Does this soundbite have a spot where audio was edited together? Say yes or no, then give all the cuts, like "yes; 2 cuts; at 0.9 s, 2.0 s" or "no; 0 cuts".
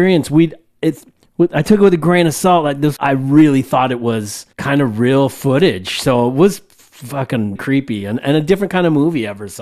yes; 4 cuts; at 1.2 s, 3.0 s, 4.5 s, 7.6 s